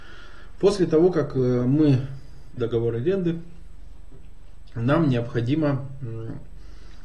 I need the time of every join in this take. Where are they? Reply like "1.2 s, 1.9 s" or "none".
2.6 s

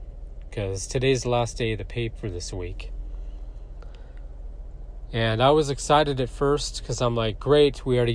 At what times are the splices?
2.1 s

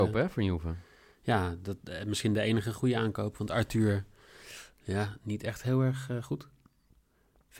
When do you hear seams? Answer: none

